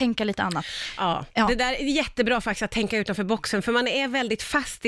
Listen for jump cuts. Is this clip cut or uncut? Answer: uncut